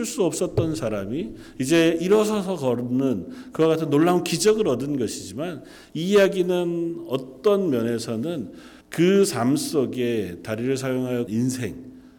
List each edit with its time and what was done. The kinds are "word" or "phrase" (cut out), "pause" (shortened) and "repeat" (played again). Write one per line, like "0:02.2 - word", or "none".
0:08.8 - pause
0:11.3 - phrase